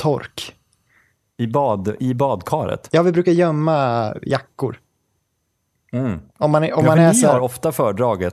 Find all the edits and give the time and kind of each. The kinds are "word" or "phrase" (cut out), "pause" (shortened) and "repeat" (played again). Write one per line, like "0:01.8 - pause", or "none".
0:06.3 - pause